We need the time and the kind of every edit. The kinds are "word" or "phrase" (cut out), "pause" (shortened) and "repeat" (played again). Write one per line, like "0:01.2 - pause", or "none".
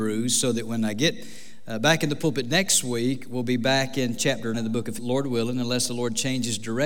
0:04.5 - word
0:05.0 - word